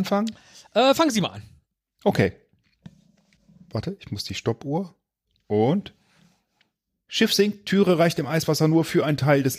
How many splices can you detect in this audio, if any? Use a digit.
0